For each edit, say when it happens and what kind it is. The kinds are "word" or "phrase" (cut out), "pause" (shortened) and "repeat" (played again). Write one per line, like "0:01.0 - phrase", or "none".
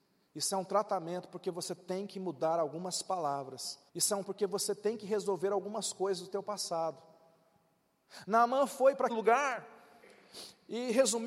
0:03.9 - pause
0:04.2 - word
0:09.1 - word